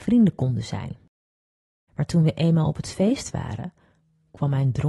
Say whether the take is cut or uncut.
uncut